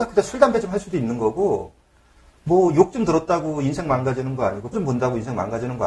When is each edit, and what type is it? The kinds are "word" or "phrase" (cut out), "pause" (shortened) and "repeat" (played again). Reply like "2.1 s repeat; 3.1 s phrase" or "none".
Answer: 4.7 s word